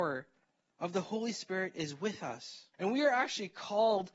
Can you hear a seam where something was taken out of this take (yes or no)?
yes